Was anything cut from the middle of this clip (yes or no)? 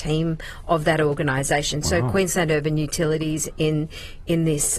no